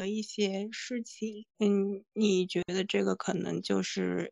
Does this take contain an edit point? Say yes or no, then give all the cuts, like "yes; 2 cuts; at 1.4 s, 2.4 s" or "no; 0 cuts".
yes; 1 cut; at 1.5 s